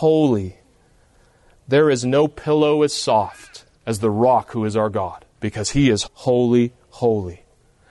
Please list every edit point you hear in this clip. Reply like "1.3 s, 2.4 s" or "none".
3.7 s, 5.3 s, 6.0 s